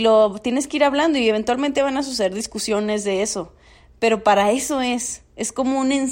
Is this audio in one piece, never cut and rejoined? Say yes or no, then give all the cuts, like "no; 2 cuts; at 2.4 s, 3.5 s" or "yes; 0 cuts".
yes; 0 cuts